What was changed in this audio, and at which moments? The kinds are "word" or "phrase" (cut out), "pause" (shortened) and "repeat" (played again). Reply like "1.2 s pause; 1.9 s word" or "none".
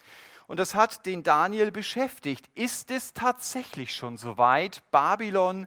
none